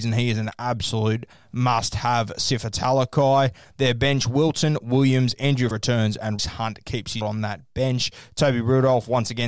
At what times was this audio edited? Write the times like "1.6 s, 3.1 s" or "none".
5.7 s, 6.4 s, 7.2 s

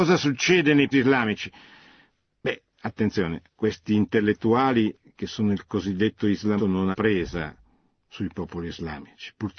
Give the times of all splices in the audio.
0.9 s, 3.5 s, 6.6 s, 6.9 s

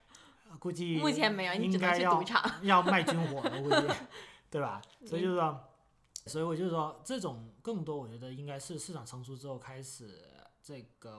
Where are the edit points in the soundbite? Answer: 6.3 s

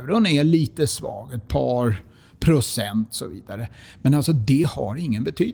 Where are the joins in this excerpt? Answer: none

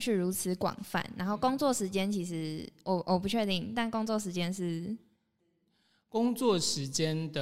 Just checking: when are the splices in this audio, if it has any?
none

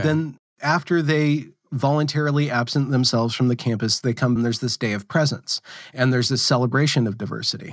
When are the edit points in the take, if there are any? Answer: 4.4 s

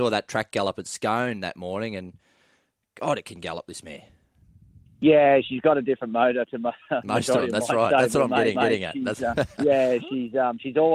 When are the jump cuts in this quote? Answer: 8.5 s, 9.6 s

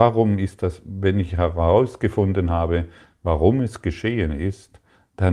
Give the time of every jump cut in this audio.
none

